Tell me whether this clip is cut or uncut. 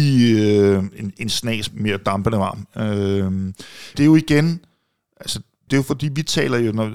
cut